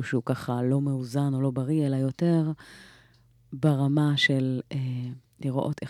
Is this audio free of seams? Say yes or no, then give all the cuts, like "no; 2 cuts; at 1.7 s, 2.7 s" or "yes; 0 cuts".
yes; 0 cuts